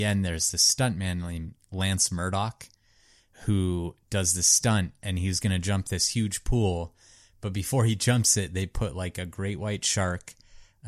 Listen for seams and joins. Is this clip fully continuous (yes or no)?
yes